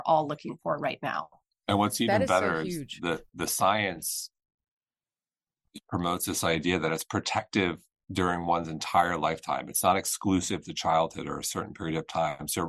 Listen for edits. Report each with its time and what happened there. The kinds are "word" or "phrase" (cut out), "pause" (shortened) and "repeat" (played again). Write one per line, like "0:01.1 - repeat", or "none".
none